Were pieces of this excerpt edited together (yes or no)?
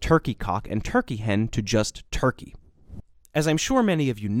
no